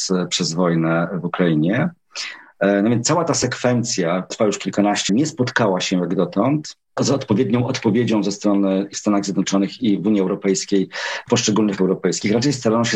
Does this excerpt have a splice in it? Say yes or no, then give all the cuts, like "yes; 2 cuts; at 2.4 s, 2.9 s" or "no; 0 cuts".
yes; 5 cuts; at 4.3 s, 5.1 s, 8.9 s, 11.3 s, 11.8 s